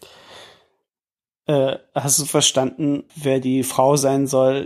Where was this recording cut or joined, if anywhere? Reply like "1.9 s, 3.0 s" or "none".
3.1 s